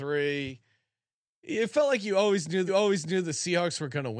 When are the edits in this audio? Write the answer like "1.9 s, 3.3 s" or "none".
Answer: 2.7 s